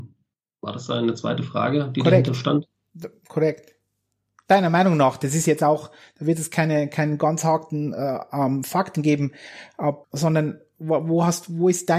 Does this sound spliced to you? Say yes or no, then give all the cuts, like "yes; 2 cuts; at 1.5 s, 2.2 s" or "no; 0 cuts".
yes; 1 cut; at 10.0 s